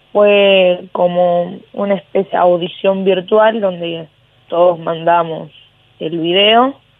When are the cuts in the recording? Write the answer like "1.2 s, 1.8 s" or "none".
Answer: 2.3 s